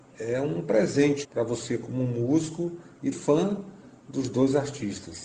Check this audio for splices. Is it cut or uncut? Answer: cut